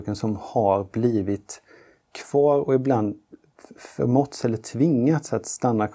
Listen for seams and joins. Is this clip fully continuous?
yes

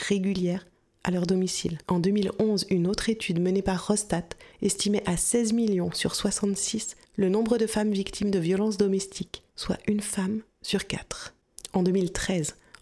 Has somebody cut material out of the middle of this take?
yes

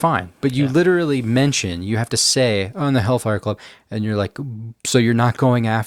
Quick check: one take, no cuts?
no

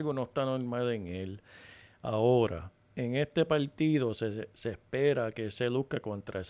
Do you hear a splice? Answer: no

